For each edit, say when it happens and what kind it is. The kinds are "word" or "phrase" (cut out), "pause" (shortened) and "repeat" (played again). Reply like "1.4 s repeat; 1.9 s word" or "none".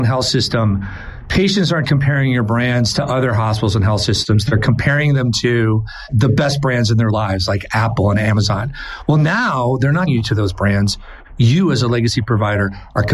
1.8 s word; 10.1 s phrase